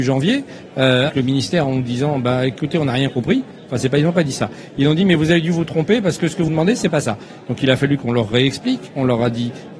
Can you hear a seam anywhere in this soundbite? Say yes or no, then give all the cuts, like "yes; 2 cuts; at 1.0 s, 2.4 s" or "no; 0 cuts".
yes; 2 cuts; at 1.1 s, 6.5 s